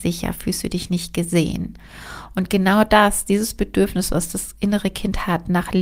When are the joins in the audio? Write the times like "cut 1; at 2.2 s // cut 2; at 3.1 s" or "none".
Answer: none